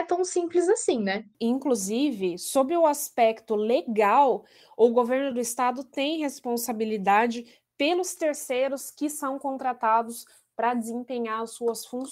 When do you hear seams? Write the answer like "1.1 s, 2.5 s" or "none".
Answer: none